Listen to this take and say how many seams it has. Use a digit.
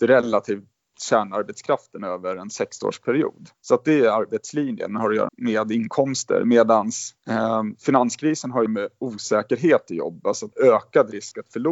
5